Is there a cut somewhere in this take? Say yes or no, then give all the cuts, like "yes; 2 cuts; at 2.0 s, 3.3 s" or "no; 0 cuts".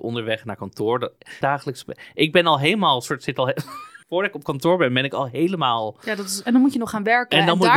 yes; 2 cuts; at 1.4 s, 4.0 s